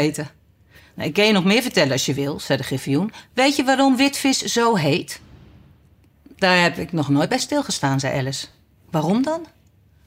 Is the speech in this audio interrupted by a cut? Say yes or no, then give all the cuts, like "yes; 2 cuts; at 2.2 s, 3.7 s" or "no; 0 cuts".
no; 0 cuts